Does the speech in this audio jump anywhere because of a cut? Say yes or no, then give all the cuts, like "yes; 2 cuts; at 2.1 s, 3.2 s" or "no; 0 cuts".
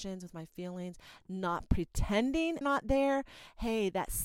yes; 1 cut; at 2.6 s